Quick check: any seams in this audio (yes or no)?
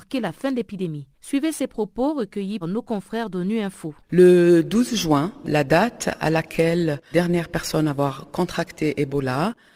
yes